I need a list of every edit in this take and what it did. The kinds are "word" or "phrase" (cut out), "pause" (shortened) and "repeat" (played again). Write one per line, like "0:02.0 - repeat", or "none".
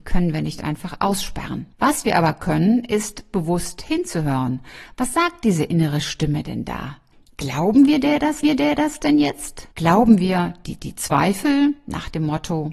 0:01.7 - pause
0:08.4 - repeat
0:09.7 - pause
0:10.8 - repeat